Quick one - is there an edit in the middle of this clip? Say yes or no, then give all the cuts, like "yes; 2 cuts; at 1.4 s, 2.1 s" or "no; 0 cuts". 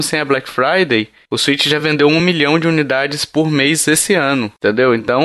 no; 0 cuts